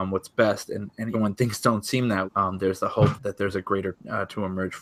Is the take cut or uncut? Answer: cut